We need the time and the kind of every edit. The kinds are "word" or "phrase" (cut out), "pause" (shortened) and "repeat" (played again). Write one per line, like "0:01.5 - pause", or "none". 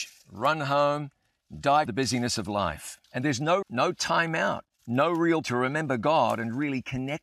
0:01.9 - phrase
0:03.0 - pause
0:03.6 - word
0:04.7 - pause
0:05.4 - word